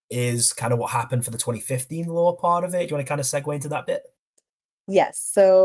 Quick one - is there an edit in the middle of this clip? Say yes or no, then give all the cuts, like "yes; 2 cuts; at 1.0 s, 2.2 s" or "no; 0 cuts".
no; 0 cuts